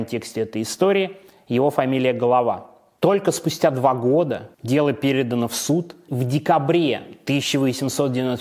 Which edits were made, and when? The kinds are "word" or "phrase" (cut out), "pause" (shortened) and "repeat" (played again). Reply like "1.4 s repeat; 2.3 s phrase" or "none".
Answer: 4.5 s pause; 6.1 s word